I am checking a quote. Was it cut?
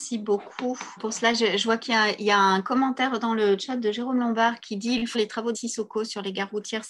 yes; 3 cuts; at 1.0 s, 5.1 s, 5.5 s

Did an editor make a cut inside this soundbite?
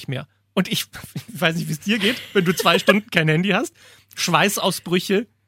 no; 0 cuts

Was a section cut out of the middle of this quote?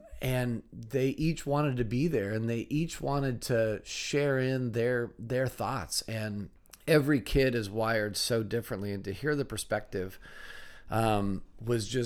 yes; 1 cut; at 6.6 s

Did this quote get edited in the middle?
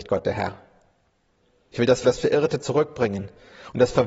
yes; 1 cut; at 2.0 s

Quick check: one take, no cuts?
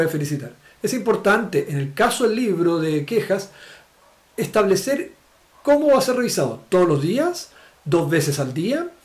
yes; 0 cuts

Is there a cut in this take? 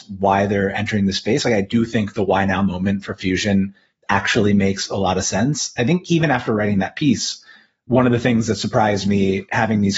no; 0 cuts

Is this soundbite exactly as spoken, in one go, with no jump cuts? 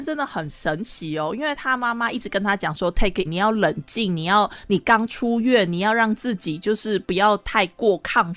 no; 1 cut; at 3.3 s

